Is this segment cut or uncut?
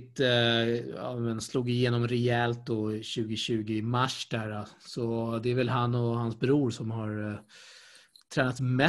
uncut